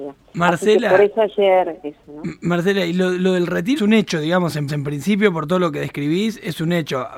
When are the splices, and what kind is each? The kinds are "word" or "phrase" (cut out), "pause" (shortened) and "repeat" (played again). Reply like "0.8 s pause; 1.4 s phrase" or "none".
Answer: 1.8 s phrase; 3.8 s word; 4.7 s repeat